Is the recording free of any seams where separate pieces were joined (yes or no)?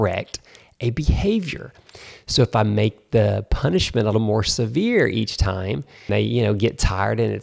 no